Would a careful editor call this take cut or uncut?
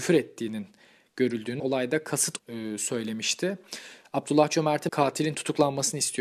cut